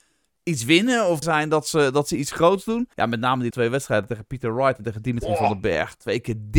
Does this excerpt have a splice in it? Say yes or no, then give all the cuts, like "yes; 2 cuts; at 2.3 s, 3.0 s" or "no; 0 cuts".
yes; 3 cuts; at 1.2 s, 2.9 s, 3.5 s